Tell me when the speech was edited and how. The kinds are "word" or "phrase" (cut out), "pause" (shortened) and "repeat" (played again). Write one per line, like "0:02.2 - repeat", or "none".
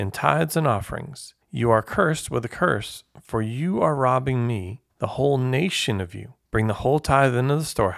0:01.4 - pause
0:04.9 - pause
0:06.4 - pause